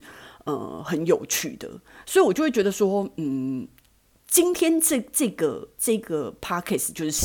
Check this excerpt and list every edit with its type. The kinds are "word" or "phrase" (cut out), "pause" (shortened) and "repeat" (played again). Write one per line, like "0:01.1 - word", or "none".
none

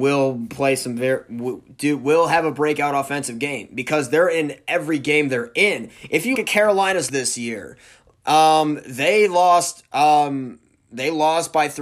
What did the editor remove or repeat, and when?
0:06.3 - word
0:07.1 - word

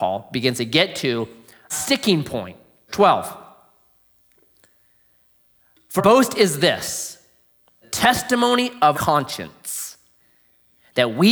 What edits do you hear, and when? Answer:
0:01.7 - word
0:02.9 - word
0:06.0 - word
0:07.8 - word
0:08.9 - word

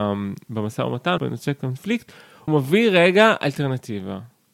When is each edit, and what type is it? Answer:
0:01.2 - phrase
0:02.5 - word

